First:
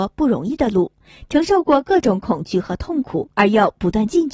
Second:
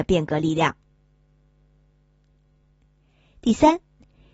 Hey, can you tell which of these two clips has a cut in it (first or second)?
first